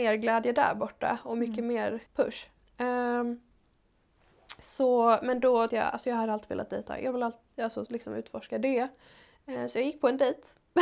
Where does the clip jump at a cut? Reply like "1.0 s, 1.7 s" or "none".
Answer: 2.1 s, 5.7 s, 7.9 s